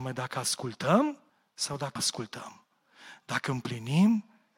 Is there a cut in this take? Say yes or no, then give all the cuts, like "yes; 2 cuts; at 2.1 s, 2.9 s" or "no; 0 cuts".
yes; 2 cuts; at 1.3 s, 2.0 s